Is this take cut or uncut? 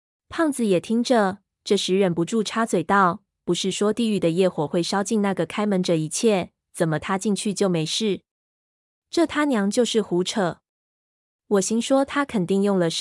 uncut